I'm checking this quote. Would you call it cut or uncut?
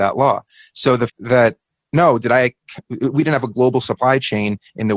cut